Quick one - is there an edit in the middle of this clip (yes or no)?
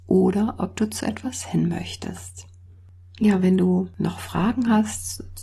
no